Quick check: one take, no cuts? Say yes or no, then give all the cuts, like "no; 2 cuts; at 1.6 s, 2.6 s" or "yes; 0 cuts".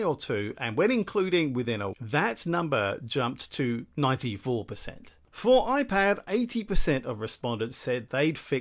no; 1 cut; at 1.9 s